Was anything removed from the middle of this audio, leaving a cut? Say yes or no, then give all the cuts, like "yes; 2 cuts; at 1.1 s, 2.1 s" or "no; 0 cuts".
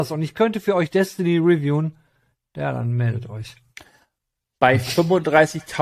no; 0 cuts